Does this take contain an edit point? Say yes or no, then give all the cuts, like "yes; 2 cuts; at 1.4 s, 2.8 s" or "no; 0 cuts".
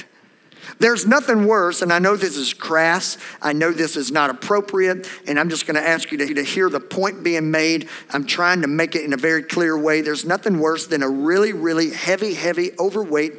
yes; 1 cut; at 6.3 s